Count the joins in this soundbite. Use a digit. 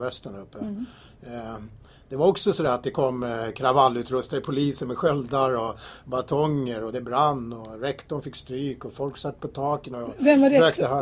0